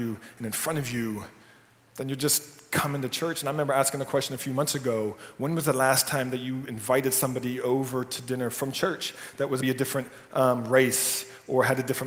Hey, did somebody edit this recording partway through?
yes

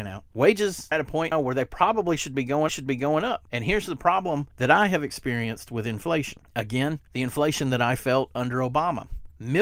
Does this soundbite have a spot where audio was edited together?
yes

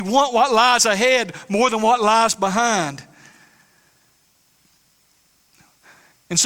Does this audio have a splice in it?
no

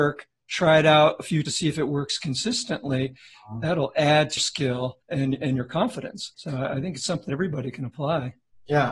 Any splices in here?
yes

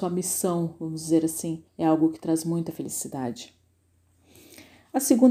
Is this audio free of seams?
no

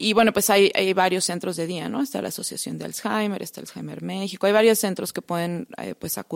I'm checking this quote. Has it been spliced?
no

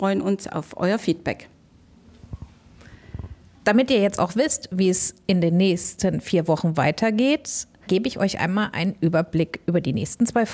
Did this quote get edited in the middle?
yes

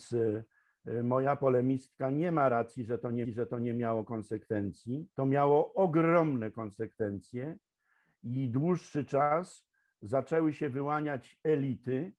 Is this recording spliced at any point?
yes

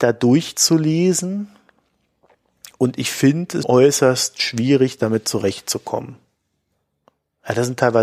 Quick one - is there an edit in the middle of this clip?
yes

